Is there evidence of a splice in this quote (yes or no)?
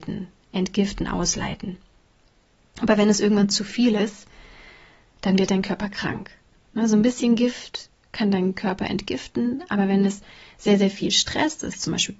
no